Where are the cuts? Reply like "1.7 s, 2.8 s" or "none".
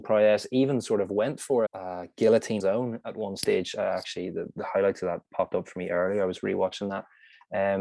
1.7 s, 2.6 s